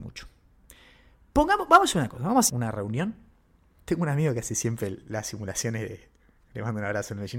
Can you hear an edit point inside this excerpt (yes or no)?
yes